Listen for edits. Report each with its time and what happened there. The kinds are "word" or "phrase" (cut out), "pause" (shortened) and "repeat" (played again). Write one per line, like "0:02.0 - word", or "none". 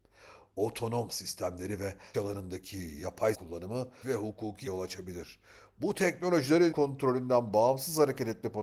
0:01.1 - word
0:02.1 - word
0:03.3 - word
0:04.0 - word
0:04.7 - word
0:06.7 - word